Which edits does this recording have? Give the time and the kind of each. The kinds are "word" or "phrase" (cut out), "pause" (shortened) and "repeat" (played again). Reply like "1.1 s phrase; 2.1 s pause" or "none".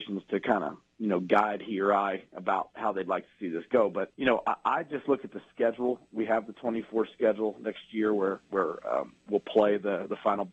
4.1 s pause